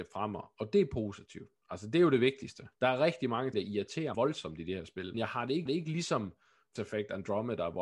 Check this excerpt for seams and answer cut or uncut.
cut